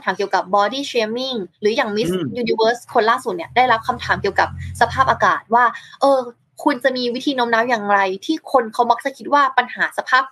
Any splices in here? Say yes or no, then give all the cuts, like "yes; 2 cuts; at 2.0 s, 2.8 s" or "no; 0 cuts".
yes; 1 cut; at 6.4 s